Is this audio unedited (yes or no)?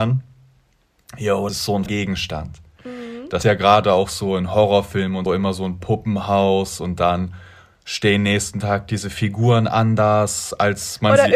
no